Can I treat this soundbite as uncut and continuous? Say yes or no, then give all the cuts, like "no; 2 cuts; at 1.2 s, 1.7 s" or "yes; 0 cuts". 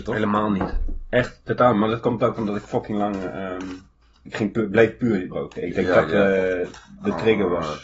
no; 2 cuts; at 4.3 s, 5.3 s